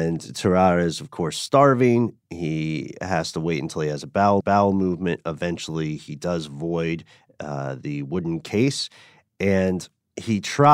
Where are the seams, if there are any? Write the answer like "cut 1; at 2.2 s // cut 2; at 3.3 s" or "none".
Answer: cut 1; at 4.4 s